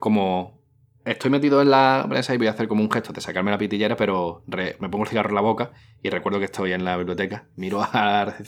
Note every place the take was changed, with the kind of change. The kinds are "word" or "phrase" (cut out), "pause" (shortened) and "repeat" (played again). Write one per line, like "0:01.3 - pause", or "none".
none